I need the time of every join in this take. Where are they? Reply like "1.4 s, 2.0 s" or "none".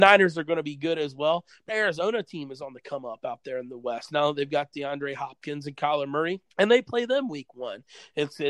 1.7 s, 6.5 s